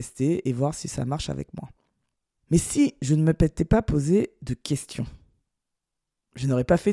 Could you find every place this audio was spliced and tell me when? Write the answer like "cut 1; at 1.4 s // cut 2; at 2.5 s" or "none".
cut 1; at 2.1 s